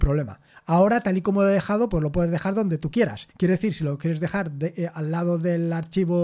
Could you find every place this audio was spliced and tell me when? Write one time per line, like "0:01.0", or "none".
0:03.3